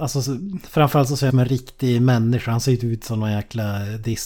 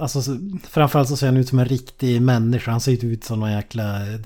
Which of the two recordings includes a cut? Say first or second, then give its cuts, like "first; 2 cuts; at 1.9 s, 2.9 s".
first; 1 cut; at 1.3 s